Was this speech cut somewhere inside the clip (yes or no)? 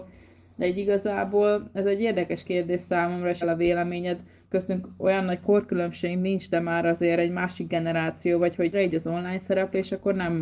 yes